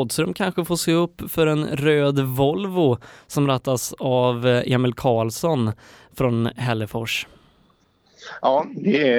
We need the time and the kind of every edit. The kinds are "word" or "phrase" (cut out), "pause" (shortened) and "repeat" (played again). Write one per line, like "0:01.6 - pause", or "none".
none